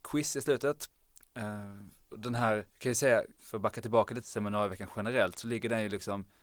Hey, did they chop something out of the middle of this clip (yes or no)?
yes